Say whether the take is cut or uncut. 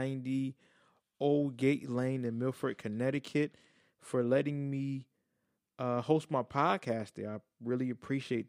uncut